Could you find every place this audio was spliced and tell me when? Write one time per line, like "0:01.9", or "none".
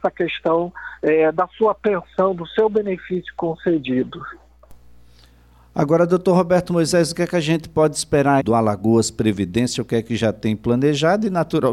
0:08.4